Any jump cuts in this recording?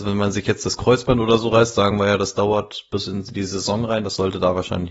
no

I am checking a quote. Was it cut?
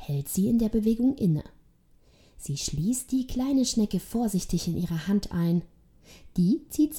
no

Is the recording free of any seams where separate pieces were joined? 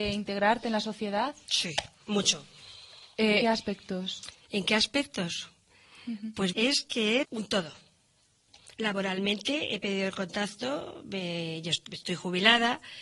no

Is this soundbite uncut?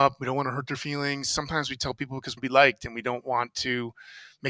no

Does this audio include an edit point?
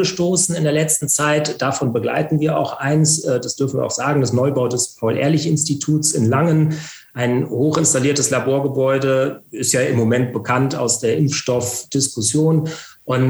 no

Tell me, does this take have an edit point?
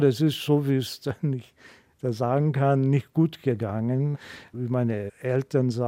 no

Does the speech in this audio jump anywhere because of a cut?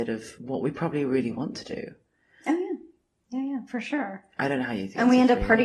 no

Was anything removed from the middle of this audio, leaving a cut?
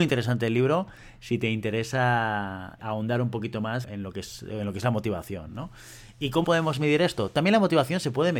yes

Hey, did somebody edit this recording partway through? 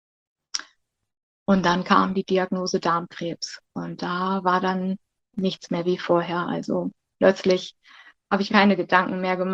yes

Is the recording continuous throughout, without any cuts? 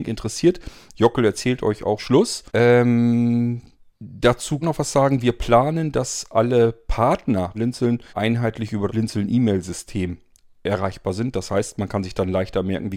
no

